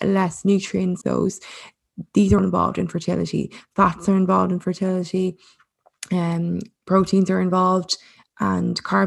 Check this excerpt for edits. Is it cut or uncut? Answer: cut